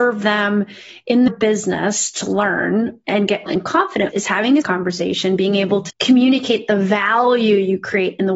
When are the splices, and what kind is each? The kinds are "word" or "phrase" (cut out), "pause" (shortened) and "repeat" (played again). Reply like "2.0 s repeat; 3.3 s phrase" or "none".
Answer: 1.3 s word; 3.5 s word; 4.1 s word; 4.6 s word; 5.9 s word